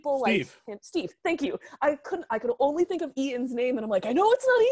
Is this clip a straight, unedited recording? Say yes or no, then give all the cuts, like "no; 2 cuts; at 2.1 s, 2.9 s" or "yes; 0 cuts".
yes; 0 cuts